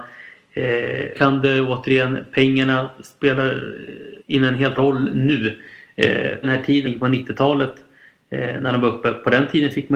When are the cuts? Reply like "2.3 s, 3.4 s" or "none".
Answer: 1.1 s, 4.2 s, 4.8 s, 6.4 s, 6.8 s